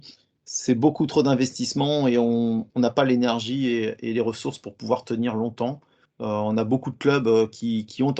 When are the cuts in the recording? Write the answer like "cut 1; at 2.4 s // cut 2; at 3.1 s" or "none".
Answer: cut 1; at 2.7 s // cut 2; at 6.1 s